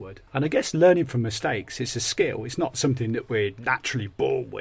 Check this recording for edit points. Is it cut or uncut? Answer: uncut